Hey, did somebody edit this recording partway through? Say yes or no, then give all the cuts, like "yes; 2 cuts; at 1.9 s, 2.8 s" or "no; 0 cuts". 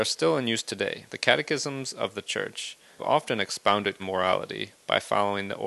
yes; 3 cuts; at 1.1 s, 3.0 s, 4.0 s